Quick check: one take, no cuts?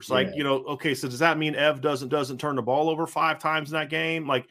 no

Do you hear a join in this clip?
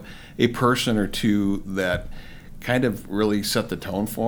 no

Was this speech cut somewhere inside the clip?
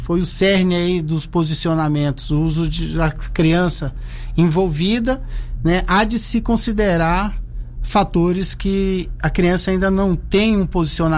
no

